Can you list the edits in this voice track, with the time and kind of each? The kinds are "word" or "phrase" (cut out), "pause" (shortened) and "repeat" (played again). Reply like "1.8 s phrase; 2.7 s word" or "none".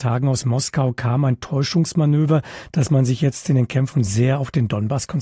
none